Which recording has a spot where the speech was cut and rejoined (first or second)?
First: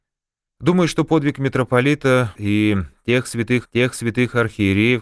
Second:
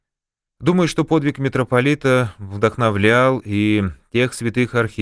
first